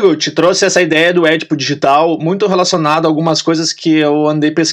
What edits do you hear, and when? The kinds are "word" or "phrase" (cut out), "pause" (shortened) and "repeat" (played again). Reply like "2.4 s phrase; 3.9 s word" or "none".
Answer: none